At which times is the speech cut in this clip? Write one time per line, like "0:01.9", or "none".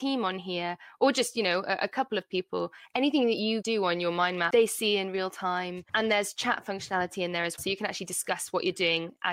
0:05.9
0:07.6